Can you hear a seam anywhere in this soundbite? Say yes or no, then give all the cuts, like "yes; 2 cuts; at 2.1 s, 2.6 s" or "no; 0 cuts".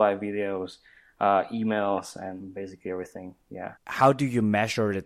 yes; 1 cut; at 3.8 s